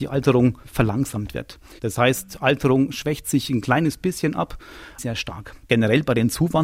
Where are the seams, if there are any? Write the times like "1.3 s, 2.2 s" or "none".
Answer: 5.0 s